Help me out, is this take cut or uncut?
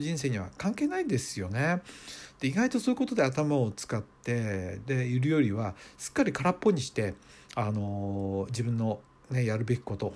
uncut